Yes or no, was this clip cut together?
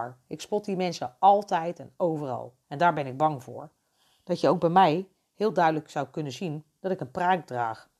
yes